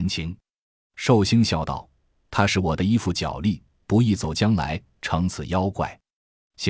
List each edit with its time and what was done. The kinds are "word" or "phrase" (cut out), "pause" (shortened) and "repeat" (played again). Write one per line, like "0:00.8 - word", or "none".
none

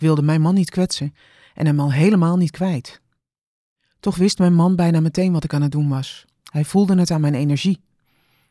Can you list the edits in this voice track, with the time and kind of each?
none

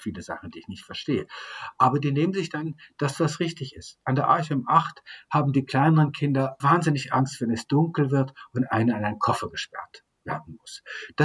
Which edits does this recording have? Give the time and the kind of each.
0:06.6 - word

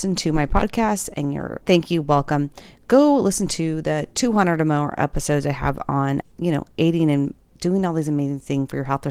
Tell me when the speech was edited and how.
0:01.6 - word
0:06.2 - word

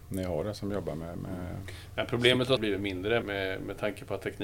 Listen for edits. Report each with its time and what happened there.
0:02.6 - word
0:03.2 - word

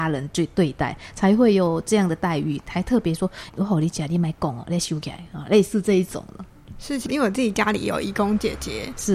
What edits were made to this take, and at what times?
0:03.5 - word

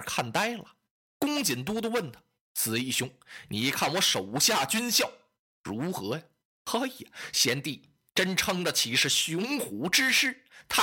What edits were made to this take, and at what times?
none

